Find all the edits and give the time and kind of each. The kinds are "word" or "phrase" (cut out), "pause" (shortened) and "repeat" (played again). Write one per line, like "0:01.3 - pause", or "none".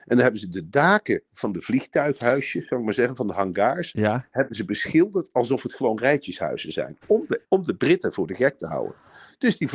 0:01.3 - pause
0:07.4 - pause